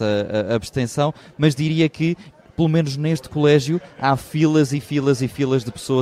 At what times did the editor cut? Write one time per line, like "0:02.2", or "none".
none